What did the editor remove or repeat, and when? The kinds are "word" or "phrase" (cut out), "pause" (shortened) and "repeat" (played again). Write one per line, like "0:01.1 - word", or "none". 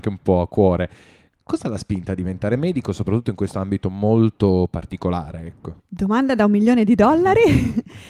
0:05.8 - pause